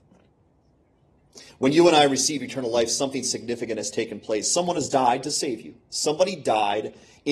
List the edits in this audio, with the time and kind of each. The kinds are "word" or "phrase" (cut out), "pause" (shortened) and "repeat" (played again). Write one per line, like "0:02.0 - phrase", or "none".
none